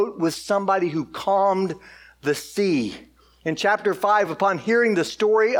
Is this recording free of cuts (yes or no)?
yes